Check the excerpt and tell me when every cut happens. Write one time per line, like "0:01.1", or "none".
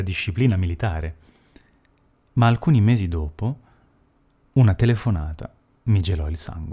none